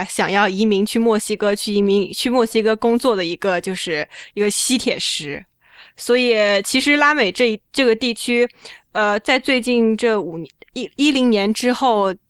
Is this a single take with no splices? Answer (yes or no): yes